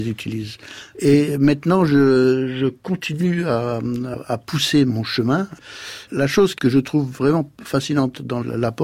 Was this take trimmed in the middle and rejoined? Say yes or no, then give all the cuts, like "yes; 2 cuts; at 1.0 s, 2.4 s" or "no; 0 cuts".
no; 0 cuts